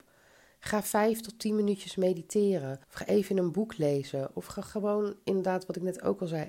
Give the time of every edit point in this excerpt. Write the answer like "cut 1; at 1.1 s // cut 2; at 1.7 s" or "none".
cut 1; at 2.8 s